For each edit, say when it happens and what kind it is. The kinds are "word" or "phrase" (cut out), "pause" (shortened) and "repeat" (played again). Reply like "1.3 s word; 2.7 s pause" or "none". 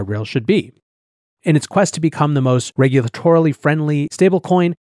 none